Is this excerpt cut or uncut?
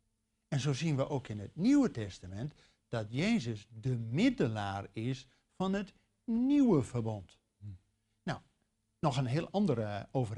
uncut